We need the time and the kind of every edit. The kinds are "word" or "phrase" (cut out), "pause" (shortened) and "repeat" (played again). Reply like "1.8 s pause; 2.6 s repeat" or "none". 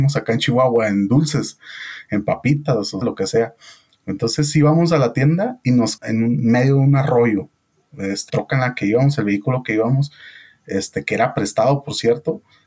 3.0 s word; 6.0 s word; 8.3 s word